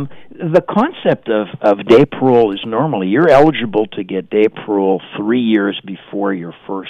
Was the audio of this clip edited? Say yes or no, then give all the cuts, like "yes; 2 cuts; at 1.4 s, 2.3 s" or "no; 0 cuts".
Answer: no; 0 cuts